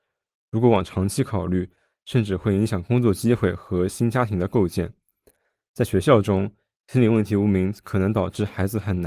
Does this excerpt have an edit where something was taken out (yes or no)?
no